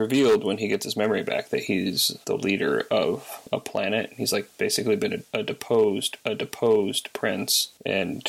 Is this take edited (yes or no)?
yes